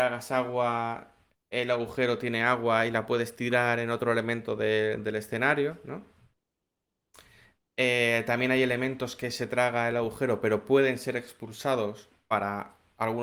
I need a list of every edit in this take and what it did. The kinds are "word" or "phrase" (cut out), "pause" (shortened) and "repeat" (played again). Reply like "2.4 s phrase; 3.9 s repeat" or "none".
none